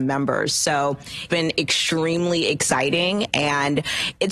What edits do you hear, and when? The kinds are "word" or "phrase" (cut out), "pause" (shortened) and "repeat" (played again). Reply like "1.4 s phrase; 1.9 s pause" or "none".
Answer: 1.3 s word